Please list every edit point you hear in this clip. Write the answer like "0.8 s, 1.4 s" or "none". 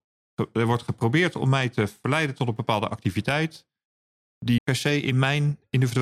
4.6 s